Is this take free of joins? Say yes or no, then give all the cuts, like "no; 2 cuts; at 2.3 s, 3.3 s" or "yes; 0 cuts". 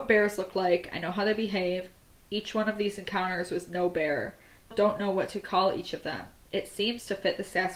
no; 1 cut; at 4.7 s